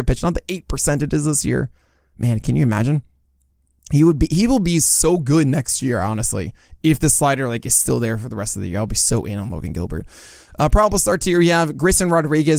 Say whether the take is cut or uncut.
uncut